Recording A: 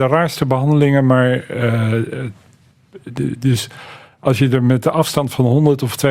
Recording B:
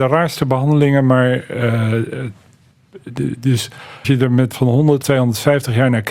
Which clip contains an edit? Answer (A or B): B